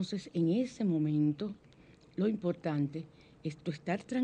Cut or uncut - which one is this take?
uncut